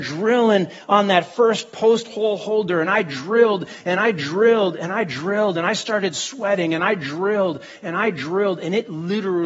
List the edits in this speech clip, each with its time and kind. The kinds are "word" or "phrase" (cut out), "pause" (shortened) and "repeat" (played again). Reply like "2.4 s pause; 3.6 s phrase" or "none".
none